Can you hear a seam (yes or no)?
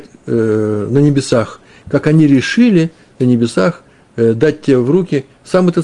no